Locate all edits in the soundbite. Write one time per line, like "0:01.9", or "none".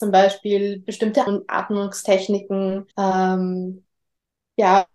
0:01.3
0:02.9